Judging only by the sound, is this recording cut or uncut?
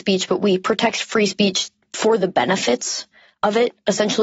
uncut